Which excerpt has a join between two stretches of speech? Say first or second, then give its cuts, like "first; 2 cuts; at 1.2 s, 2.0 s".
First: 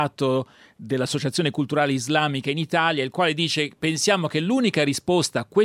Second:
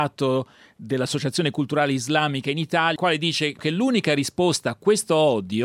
second; 2 cuts; at 3.0 s, 3.6 s